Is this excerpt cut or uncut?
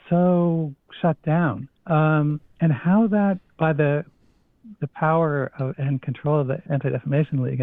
cut